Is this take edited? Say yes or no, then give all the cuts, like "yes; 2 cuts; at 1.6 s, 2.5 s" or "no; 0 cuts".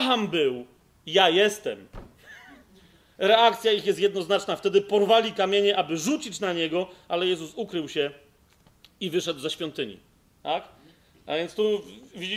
no; 0 cuts